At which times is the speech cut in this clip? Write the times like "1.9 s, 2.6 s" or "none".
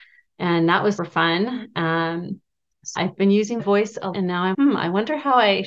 1.0 s, 3.0 s, 3.6 s, 4.1 s, 4.5 s